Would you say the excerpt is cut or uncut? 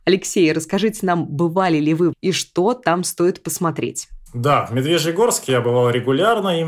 cut